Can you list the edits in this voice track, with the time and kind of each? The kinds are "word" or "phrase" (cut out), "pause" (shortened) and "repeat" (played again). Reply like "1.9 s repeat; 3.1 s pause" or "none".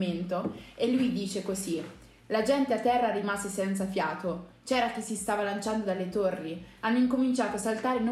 none